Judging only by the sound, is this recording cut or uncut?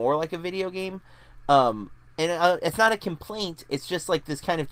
cut